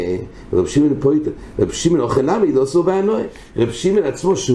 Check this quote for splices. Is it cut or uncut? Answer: uncut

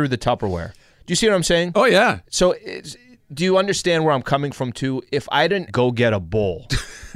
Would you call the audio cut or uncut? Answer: cut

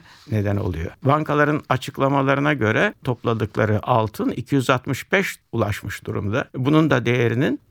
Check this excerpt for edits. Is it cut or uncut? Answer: cut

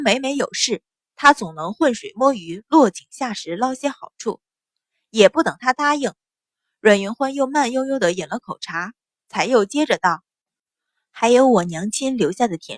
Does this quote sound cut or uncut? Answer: uncut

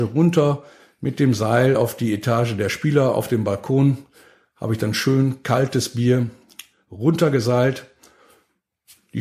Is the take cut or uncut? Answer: uncut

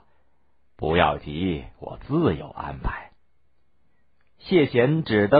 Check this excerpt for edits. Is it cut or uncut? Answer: uncut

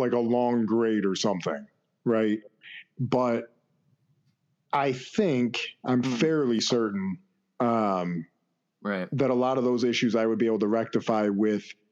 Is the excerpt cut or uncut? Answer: uncut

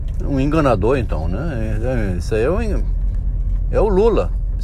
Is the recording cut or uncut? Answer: uncut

